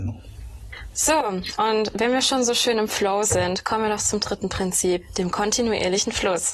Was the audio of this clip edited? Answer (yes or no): no